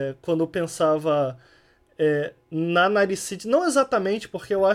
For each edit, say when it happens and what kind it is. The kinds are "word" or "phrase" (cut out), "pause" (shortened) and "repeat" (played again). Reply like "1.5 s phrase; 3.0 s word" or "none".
none